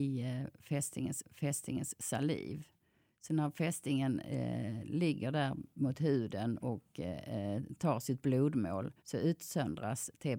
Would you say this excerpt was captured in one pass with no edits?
no; 3 cuts; at 1.2 s, 6.6 s, 9.0 s

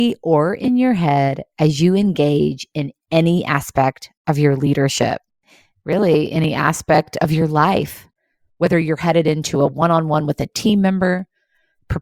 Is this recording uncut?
yes; 0 cuts

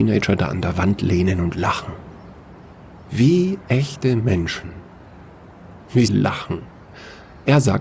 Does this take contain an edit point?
yes; 1 cut; at 6.1 s

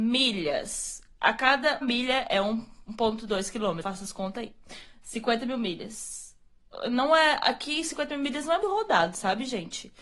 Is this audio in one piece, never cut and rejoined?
no; 3 cuts; at 1.8 s, 3.8 s, 8.6 s

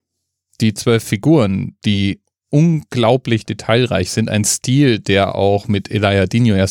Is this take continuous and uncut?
yes; 0 cuts

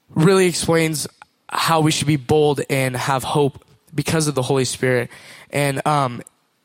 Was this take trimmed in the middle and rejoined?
no; 0 cuts

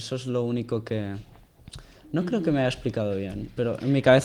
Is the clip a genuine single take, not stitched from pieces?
yes; 0 cuts

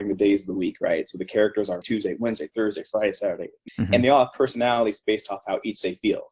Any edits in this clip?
yes; 2 cuts; at 1.8 s, 3.7 s

